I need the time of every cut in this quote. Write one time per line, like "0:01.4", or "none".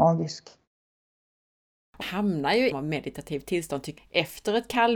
0:02.0
0:02.7
0:04.0

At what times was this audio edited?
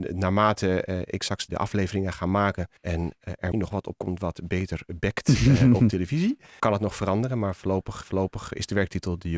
0:01.5
0:02.8
0:03.5
0:04.0
0:06.6
0:08.0

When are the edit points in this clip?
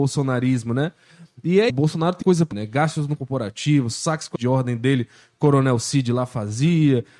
0:01.7
0:02.2
0:02.5
0:03.2
0:04.4

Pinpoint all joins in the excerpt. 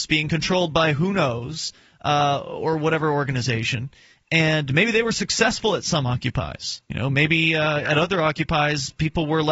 0:06.9

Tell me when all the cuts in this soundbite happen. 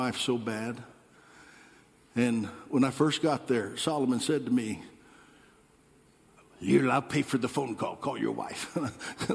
none

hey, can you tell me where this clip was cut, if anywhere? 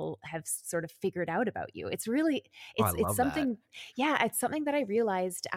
none

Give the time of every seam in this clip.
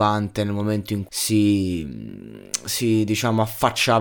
0:01.0

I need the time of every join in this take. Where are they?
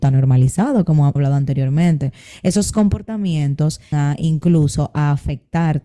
0:01.2
0:03.9

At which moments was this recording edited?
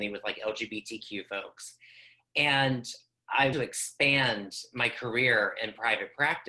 0:03.5

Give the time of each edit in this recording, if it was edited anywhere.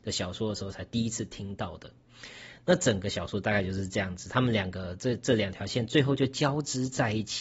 none

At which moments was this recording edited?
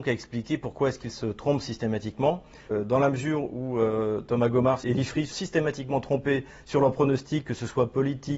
0:04.8
0:05.3

